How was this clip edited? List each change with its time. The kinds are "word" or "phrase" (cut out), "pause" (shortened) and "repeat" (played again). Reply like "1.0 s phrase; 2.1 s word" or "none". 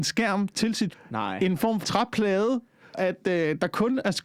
0.9 s word; 1.8 s word; 2.9 s word